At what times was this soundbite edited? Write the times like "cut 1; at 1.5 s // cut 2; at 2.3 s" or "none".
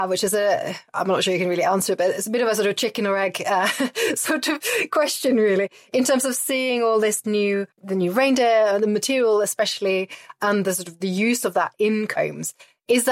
none

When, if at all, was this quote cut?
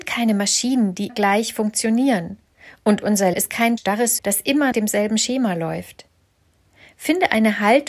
cut 1; at 1.1 s // cut 2; at 3.3 s // cut 3; at 3.8 s // cut 4; at 4.2 s // cut 5; at 4.7 s

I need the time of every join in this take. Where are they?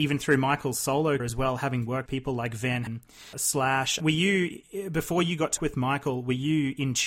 cut 1; at 1.2 s // cut 2; at 2.1 s // cut 3; at 2.9 s // cut 4; at 3.3 s // cut 5; at 4.0 s // cut 6; at 5.6 s

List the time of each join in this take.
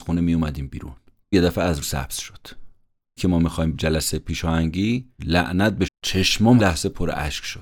cut 1; at 1.3 s // cut 2; at 1.8 s // cut 3; at 3.2 s // cut 4; at 3.7 s // cut 5; at 5.2 s // cut 6; at 5.9 s // cut 7; at 6.6 s

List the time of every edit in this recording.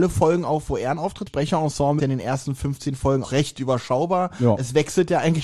cut 1; at 1.3 s // cut 2; at 2.0 s // cut 3; at 3.2 s

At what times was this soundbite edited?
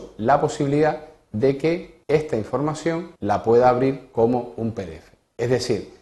cut 1; at 2.0 s // cut 2; at 3.2 s

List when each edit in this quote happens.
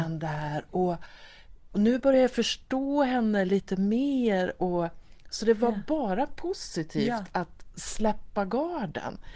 none

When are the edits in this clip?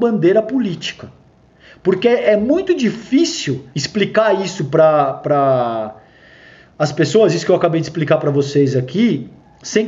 cut 1; at 3.7 s

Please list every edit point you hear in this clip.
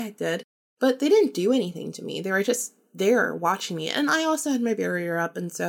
none

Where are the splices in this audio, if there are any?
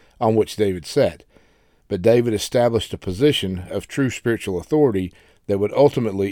none

